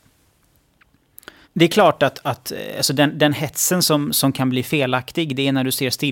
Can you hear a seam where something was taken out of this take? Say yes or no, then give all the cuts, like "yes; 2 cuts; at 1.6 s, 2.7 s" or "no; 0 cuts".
yes; 1 cut; at 1.4 s